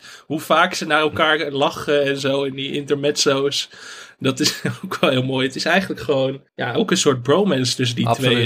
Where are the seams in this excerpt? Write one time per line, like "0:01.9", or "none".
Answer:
0:02.5
0:06.5